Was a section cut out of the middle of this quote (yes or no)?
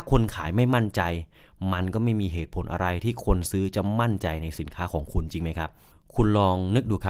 no